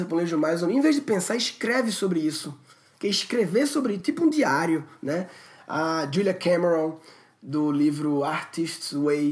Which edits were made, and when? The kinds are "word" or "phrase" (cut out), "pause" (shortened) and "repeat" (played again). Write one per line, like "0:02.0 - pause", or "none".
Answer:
none